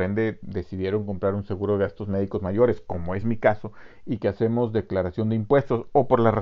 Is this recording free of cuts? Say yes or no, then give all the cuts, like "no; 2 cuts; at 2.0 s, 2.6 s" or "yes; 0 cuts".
yes; 0 cuts